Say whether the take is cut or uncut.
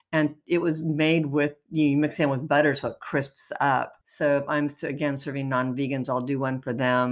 cut